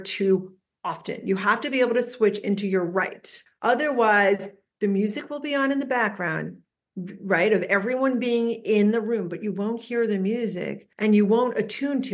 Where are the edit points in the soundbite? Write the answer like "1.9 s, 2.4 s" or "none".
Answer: 3.5 s, 6.7 s, 10.9 s